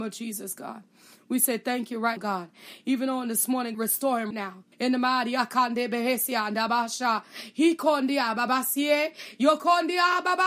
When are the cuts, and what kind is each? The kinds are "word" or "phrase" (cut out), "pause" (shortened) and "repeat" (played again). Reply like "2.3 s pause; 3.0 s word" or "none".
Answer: 2.2 s word; 3.7 s phrase; 4.3 s word; 4.7 s pause